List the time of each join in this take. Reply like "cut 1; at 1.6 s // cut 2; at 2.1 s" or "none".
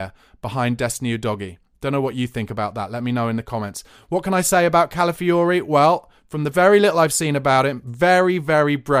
none